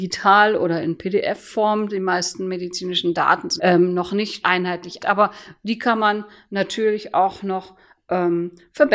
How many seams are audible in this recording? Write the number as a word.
three